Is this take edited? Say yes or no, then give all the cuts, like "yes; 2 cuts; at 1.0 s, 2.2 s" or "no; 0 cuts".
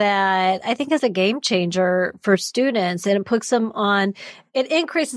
yes; 1 cut; at 1.0 s